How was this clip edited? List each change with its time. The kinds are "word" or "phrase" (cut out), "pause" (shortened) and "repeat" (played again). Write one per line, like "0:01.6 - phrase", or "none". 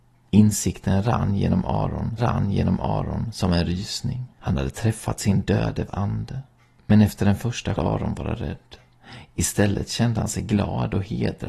0:02.2 - repeat
0:04.3 - pause
0:05.9 - word
0:07.8 - phrase